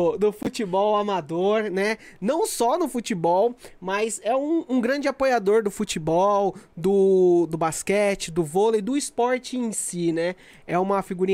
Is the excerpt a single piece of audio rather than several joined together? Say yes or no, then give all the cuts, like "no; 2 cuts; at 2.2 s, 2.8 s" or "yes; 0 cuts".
yes; 0 cuts